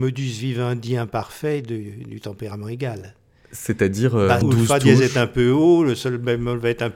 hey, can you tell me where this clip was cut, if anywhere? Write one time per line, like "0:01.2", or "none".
0:04.4